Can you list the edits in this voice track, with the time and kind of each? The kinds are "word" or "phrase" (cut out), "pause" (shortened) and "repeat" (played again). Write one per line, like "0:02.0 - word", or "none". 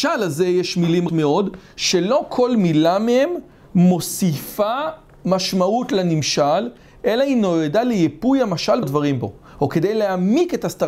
0:01.1 - word
0:08.8 - word